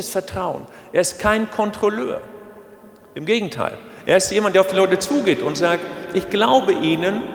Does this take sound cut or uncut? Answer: uncut